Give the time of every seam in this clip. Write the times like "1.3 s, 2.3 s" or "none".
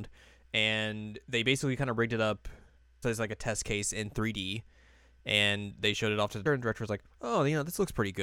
3.0 s, 6.5 s